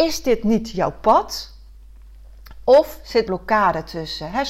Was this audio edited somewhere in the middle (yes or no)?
yes